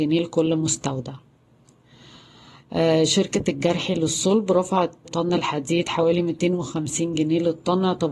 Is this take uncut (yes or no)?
no